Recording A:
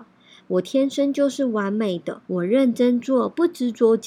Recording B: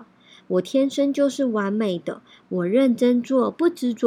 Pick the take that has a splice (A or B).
A